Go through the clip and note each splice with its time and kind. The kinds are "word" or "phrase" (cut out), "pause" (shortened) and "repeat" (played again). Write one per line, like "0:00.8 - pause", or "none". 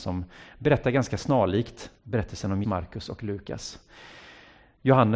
0:02.0 - pause
0:02.6 - phrase

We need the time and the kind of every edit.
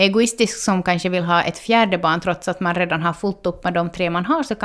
none

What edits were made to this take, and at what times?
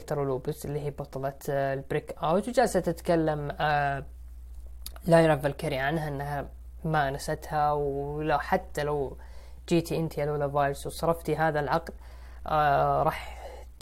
none

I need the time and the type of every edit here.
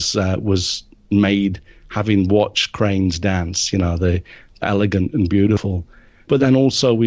0:04.6 - word

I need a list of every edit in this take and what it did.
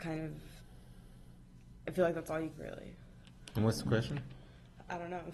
0:01.9 - word
0:02.5 - phrase

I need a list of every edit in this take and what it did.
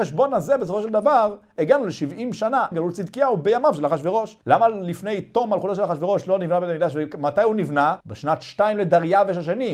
0:02.7 - word
0:04.4 - pause
0:08.0 - pause

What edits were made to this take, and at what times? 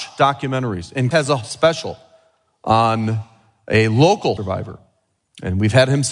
0:01.1 - word
0:04.4 - word

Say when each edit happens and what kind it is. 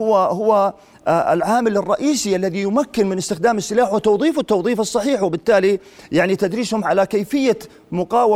none

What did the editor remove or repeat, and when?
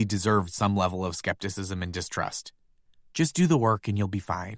none

